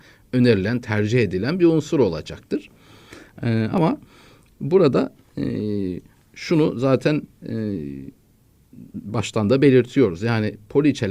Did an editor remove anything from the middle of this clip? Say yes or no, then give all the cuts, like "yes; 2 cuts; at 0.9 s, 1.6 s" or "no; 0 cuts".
no; 0 cuts